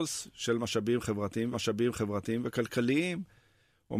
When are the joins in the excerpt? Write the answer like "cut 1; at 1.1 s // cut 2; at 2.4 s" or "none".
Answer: cut 1; at 1.5 s